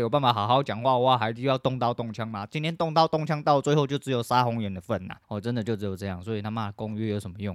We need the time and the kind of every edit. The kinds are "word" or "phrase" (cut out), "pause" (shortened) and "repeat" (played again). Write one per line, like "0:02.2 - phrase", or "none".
0:05.2 - pause